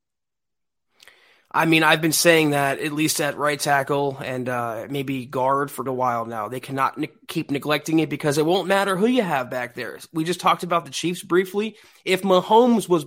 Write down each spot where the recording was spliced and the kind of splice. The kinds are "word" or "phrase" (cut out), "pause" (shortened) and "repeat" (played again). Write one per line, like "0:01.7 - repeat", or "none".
0:05.9 - word